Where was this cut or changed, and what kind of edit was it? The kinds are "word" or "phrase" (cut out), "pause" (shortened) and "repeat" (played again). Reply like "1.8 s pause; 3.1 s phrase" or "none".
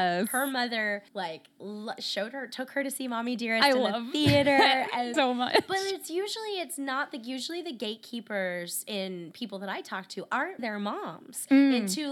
1.1 s pause; 5.1 s word; 10.6 s word